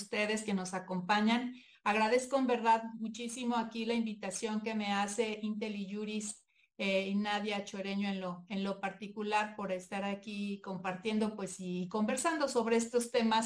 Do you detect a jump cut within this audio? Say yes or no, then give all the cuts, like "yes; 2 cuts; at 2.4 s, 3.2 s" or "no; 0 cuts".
no; 0 cuts